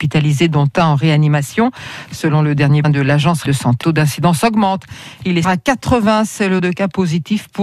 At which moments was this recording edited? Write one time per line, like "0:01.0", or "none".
0:02.8
0:03.5
0:03.8
0:05.4
0:06.6